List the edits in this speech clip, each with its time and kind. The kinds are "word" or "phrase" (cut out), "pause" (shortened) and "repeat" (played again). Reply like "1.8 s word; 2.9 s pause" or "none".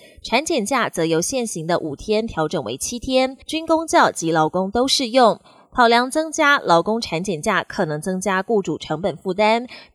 3.4 s pause